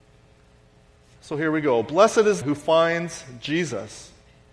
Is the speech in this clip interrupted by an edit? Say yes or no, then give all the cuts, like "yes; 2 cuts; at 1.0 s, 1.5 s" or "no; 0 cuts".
yes; 1 cut; at 2.4 s